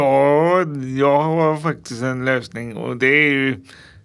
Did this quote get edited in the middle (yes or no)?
no